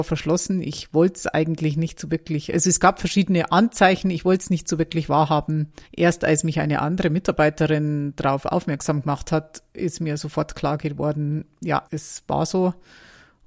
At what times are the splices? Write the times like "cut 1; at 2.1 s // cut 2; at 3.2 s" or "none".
cut 1; at 5.9 s // cut 2; at 11.9 s